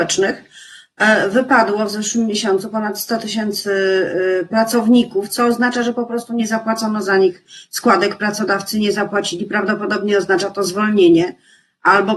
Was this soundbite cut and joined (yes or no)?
no